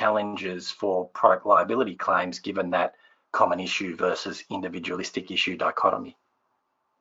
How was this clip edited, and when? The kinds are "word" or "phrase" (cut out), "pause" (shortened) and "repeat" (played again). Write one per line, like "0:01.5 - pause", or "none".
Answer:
none